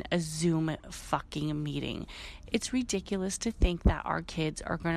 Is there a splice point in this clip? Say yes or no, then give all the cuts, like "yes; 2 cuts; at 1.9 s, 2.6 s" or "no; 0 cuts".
no; 0 cuts